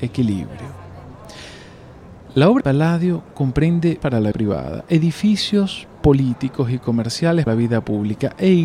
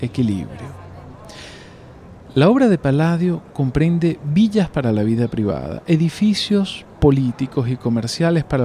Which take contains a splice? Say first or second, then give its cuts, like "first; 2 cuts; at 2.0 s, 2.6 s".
first; 4 cuts; at 2.6 s, 4.0 s, 4.3 s, 7.5 s